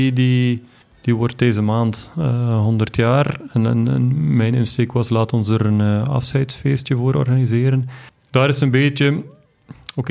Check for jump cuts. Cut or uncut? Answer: uncut